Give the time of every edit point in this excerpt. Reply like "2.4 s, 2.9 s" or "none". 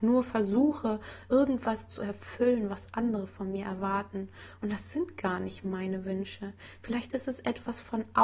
none